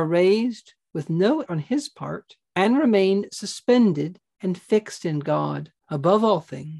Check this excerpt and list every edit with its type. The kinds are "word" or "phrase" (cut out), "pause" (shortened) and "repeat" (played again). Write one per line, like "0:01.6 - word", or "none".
0:01.5 - word
0:02.4 - pause
0:05.8 - pause